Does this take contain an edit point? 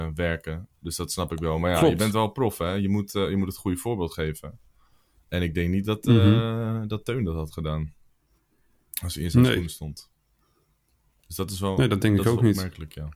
no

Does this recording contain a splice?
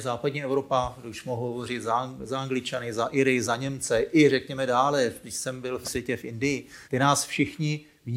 yes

